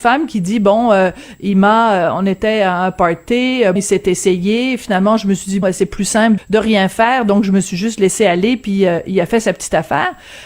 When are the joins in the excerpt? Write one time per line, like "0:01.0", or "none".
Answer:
0:03.8
0:05.6
0:06.4